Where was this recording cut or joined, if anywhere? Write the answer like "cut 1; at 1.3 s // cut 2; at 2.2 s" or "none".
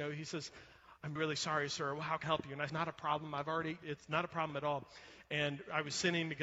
cut 1; at 1.2 s // cut 2; at 2.2 s // cut 3; at 2.7 s // cut 4; at 3.8 s